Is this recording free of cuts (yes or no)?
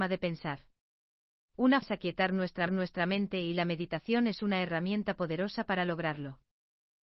no